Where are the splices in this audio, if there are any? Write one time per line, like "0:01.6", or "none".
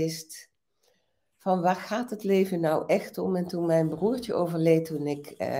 none